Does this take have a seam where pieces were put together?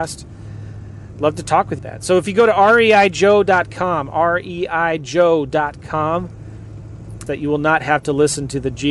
yes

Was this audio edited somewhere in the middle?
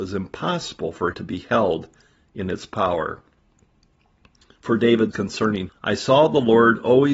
yes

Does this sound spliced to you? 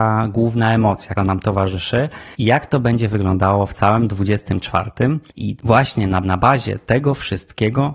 yes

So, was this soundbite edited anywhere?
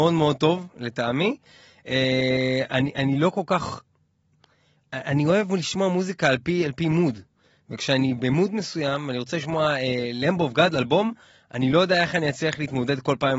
no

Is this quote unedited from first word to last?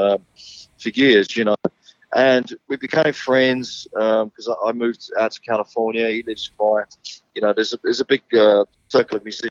no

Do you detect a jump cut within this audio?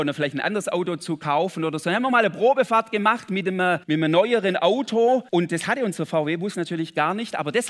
yes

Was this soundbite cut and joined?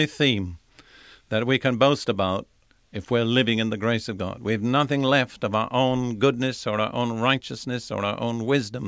no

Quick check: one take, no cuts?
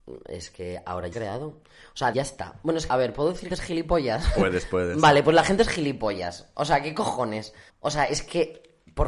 no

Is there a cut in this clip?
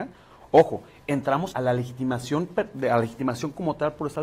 yes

